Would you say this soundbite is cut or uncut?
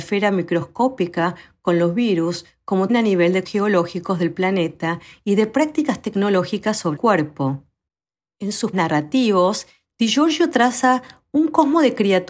cut